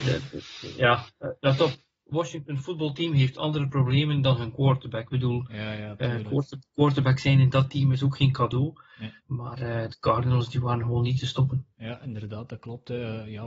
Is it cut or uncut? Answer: cut